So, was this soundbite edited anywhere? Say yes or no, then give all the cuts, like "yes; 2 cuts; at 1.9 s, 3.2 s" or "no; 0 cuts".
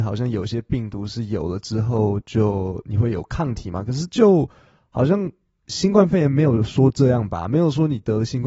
no; 0 cuts